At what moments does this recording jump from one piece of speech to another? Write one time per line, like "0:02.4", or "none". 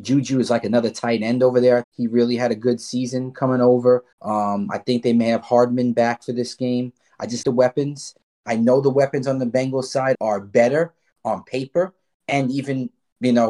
0:01.8
0:04.1
0:07.4
0:10.1